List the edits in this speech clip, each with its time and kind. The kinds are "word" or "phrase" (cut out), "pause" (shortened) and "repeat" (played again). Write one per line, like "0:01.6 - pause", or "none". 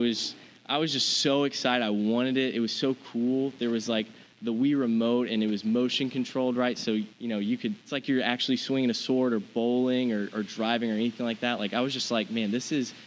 0:07.1 - pause
0:07.8 - pause